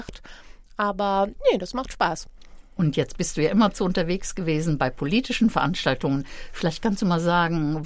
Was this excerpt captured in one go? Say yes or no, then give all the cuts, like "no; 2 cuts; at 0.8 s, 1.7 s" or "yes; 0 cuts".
yes; 0 cuts